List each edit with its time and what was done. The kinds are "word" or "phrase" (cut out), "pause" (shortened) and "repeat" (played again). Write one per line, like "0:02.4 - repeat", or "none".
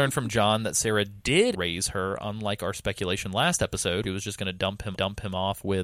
0:01.5 - word
0:04.0 - phrase
0:04.9 - repeat

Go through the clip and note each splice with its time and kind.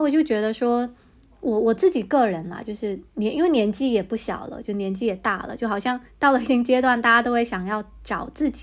none

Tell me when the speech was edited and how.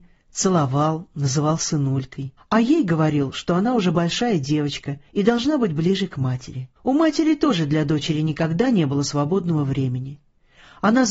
0:02.4 - pause
0:05.1 - pause
0:06.8 - pause

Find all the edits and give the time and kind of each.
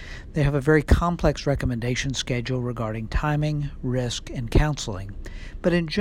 none

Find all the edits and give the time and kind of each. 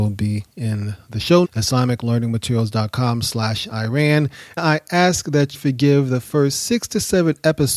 0:01.4 - word
0:04.6 - word
0:05.5 - word

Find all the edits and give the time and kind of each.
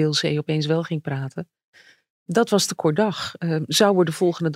none

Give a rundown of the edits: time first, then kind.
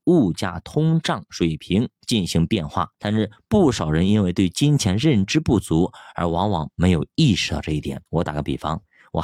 0:02.9 - pause
0:08.1 - pause

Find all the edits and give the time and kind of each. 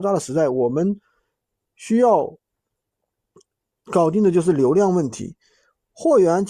none

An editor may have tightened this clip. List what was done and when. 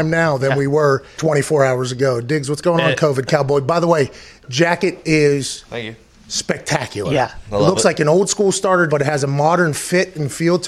0:01.2 - word
0:08.9 - word

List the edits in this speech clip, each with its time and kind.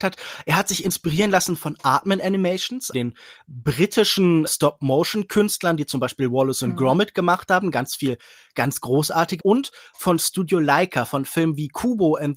0:02.9 - word
0:04.5 - word
0:09.4 - word

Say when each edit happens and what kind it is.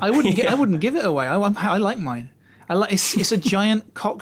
none

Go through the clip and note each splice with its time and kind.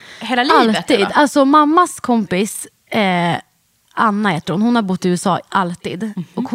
none

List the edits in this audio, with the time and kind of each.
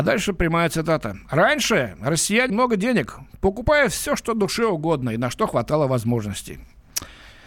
0:02.5 - word

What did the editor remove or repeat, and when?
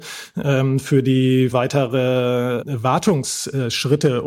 0:01.5 - word

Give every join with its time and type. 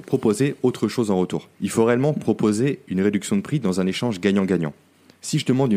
0:01.5 - pause

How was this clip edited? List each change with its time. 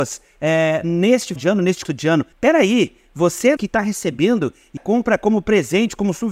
0:01.4 - word
0:01.8 - word
0:02.3 - pause
0:03.6 - word
0:04.8 - word

